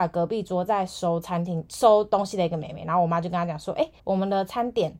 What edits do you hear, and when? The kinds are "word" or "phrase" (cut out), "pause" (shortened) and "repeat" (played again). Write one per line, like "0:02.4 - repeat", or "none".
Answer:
0:04.0 - pause